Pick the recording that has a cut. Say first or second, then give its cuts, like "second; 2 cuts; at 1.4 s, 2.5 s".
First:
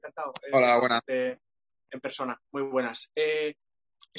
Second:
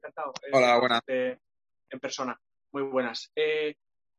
first; 1 cut; at 2.4 s